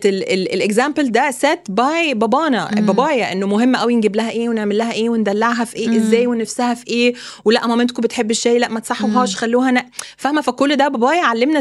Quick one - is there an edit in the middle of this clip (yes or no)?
no